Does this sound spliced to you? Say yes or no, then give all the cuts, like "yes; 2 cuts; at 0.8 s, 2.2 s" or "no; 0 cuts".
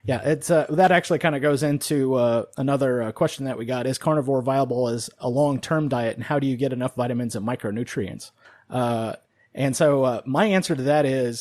yes; 1 cut; at 8.4 s